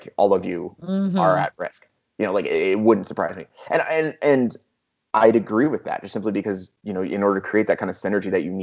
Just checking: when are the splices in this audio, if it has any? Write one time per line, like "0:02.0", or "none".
none